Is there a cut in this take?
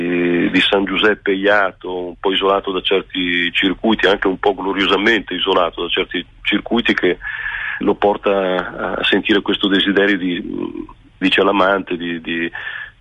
yes; 2 cuts; at 7.8 s, 11.2 s

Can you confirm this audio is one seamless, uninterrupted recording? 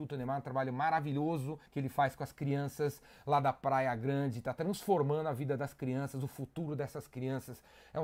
no; 1 cut; at 1.7 s

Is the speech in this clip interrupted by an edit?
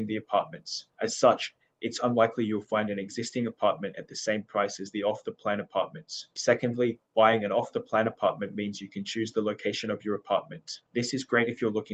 no; 0 cuts

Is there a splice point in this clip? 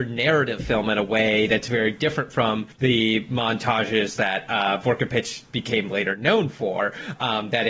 yes; 1 cut; at 2.7 s

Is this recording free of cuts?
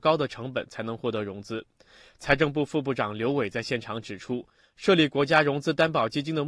yes; 0 cuts

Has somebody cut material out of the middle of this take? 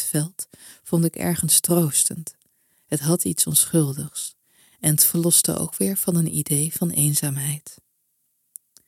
no; 0 cuts

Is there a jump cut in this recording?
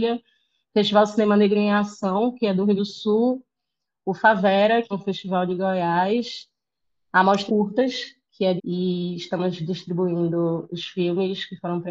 yes; 4 cuts; at 2.8 s, 4.9 s, 7.5 s, 8.6 s

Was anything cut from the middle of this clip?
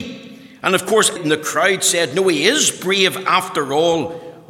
yes; 1 cut; at 1.2 s

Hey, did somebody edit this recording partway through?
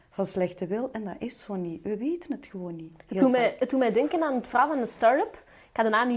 no; 0 cuts

